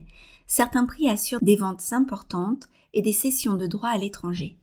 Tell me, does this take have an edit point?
no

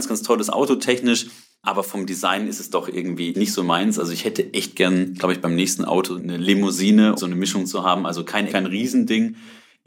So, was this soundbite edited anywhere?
yes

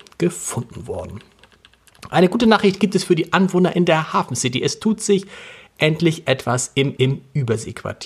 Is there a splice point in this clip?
yes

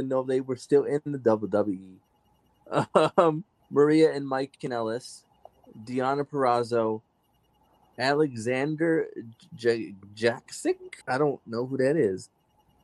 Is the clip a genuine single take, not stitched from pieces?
no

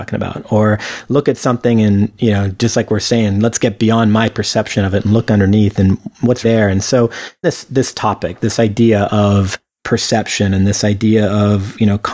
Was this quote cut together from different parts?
yes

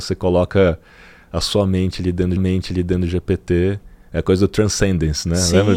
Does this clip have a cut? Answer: yes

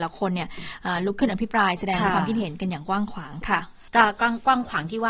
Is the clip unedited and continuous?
no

